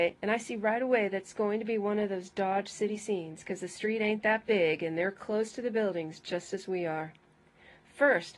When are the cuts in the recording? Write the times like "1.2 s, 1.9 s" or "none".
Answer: none